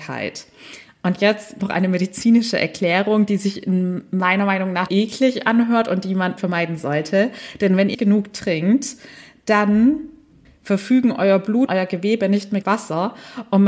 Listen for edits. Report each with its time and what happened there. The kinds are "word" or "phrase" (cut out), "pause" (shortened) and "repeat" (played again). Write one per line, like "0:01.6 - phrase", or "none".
0:01.6 - word
0:04.9 - word
0:06.4 - word
0:07.9 - word
0:11.7 - word
0:12.6 - word